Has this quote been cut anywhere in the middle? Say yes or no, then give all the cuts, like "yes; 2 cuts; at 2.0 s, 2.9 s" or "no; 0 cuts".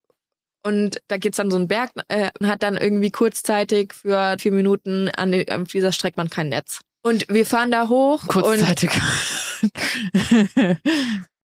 yes; 4 cuts; at 2.4 s, 4.4 s, 6.1 s, 6.9 s